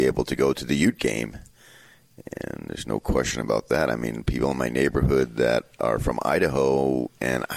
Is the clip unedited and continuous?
yes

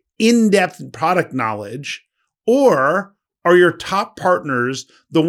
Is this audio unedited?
yes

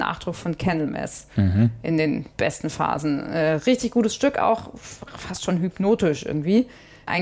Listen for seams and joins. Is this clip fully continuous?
yes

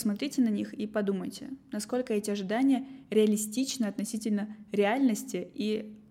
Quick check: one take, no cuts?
yes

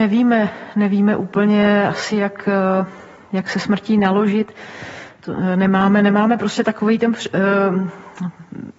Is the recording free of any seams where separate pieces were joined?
yes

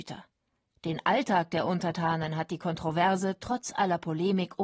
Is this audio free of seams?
yes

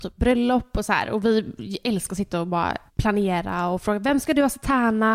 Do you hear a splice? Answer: yes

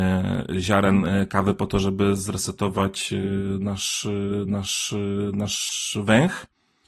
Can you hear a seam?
yes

